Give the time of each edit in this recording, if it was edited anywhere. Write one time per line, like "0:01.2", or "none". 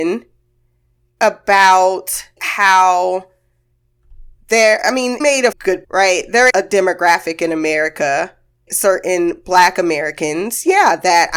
0:02.4
0:05.2
0:05.5
0:05.8
0:06.5
0:08.7